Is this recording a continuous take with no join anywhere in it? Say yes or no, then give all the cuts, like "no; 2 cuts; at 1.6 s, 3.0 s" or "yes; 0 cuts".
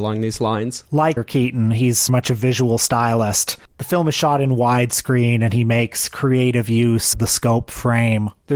no; 3 cuts; at 1.2 s, 2.1 s, 7.1 s